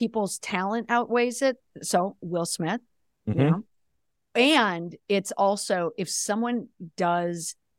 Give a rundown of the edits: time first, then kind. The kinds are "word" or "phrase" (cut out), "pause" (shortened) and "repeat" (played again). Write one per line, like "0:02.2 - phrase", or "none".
none

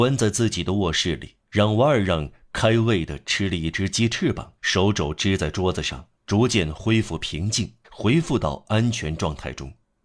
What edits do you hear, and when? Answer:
0:01.4 - pause
0:04.6 - pause
0:06.1 - pause
0:07.8 - pause

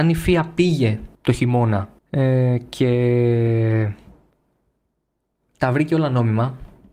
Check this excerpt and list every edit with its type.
0:01.1 - pause
0:02.0 - pause

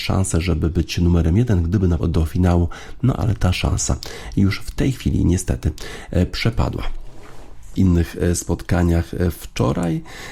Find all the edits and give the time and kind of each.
0:02.0 - phrase
0:07.8 - word

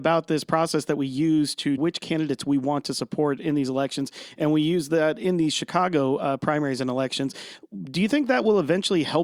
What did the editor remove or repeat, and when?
0:01.8 - word

